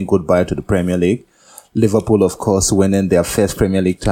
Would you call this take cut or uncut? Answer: uncut